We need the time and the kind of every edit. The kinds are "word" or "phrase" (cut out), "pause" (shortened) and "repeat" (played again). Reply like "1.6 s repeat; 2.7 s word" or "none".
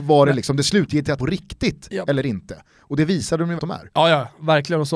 1.2 s phrase; 3.6 s word